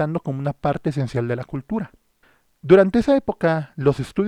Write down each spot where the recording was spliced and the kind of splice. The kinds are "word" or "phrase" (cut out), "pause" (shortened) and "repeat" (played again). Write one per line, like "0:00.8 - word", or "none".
0:02.2 - pause